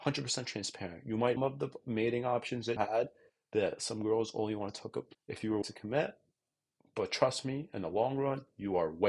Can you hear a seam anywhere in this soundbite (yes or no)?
yes